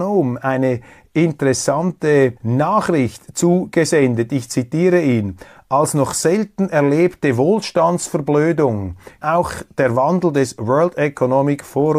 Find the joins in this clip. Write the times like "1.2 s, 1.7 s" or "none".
2.4 s, 9.2 s